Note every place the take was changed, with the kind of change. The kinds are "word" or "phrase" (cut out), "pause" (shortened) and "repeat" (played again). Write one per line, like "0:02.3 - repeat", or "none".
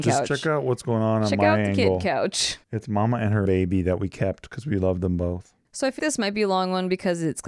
0:02.6 - pause
0:03.5 - word
0:05.6 - pause
0:06.0 - word